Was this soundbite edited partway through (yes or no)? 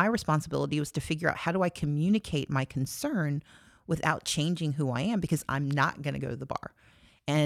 no